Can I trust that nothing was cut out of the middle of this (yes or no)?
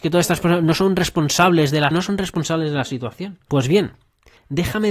no